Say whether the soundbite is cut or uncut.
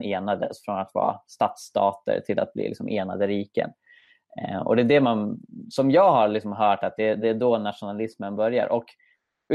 uncut